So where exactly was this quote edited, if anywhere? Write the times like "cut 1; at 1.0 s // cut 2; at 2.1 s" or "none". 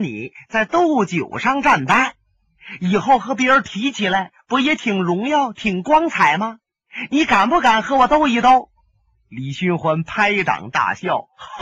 none